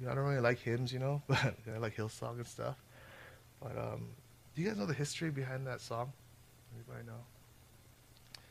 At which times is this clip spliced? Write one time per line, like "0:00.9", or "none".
none